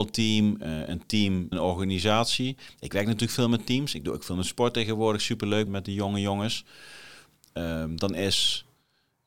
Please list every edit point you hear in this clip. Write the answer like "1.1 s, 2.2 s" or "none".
1.5 s, 5.7 s